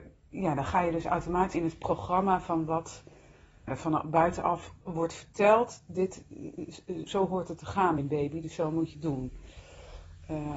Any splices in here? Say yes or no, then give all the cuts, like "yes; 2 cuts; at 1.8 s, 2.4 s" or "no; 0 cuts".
yes; 6 cuts; at 1.5 s, 3.7 s, 4.8 s, 7.1 s, 8.0 s, 8.9 s